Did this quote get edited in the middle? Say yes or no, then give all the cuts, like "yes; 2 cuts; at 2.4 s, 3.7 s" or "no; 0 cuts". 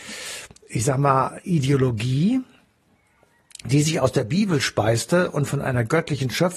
no; 0 cuts